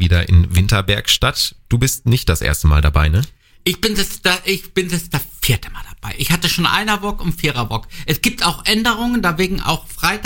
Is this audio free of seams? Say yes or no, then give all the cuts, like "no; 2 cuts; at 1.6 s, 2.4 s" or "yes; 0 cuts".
yes; 0 cuts